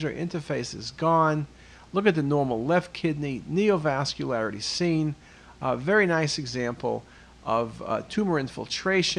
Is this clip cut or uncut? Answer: uncut